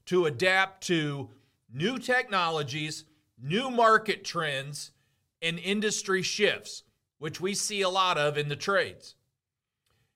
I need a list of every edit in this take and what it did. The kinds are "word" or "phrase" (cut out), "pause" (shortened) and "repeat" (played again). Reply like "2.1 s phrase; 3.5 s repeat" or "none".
none